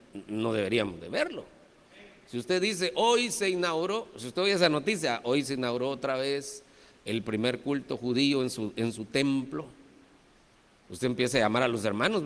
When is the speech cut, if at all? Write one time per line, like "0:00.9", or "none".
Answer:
none